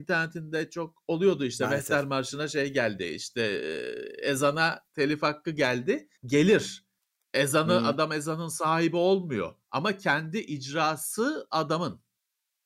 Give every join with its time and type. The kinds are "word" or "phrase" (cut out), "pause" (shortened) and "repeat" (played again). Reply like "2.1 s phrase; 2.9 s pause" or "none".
4.9 s pause; 6.2 s pause; 9.6 s pause